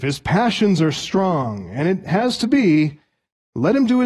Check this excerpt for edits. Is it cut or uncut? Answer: uncut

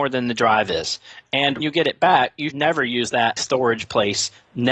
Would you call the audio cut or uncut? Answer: cut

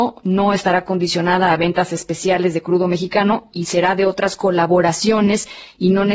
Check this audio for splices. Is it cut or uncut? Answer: uncut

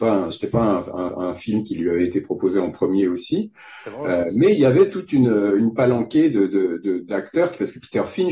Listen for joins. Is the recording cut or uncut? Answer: cut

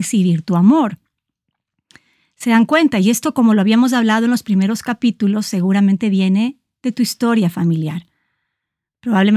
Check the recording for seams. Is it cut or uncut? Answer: uncut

